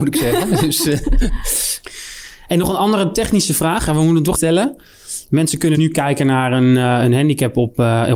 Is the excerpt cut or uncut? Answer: cut